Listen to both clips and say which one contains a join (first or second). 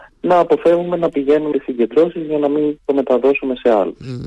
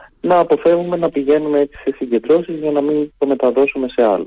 first